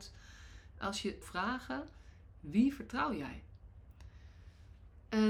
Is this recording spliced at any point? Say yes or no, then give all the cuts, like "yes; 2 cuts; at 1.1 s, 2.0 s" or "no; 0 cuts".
yes; 1 cut; at 1.2 s